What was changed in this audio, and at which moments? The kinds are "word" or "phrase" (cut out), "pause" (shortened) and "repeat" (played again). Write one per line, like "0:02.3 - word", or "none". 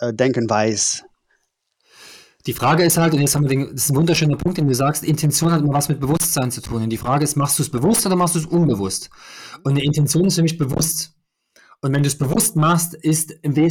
none